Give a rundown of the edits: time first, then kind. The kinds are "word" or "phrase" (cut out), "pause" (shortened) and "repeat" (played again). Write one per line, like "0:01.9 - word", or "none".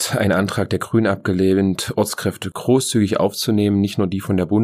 none

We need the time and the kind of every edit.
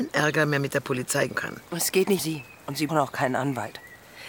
0:01.3 - word
0:01.7 - pause
0:02.2 - word
0:02.9 - word

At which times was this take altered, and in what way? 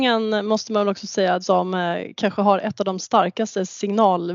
0:01.4 - phrase

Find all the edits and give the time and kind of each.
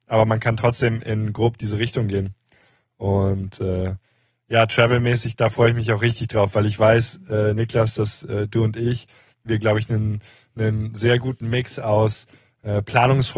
none

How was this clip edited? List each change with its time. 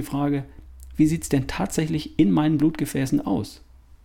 none

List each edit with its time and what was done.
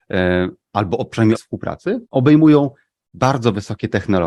0:01.3 - word
0:02.0 - pause

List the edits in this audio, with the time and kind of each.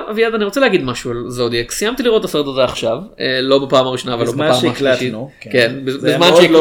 none

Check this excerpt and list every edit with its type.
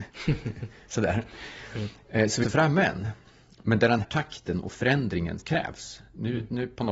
0:02.4 - word
0:04.0 - word
0:05.4 - word

